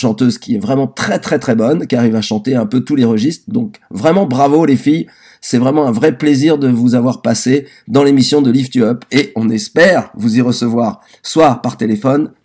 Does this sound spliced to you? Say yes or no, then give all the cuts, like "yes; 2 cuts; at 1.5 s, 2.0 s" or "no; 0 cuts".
no; 0 cuts